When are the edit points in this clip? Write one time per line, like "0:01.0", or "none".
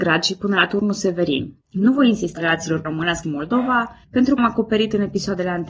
0:01.6
0:02.4
0:02.8
0:03.2
0:04.0
0:04.4